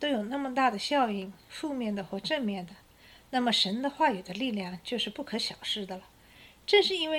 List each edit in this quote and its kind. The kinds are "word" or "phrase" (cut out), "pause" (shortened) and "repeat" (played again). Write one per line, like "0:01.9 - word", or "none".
none